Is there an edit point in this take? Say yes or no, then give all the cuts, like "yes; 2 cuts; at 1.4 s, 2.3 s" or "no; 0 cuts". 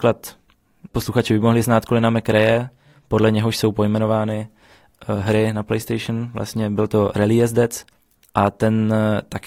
no; 0 cuts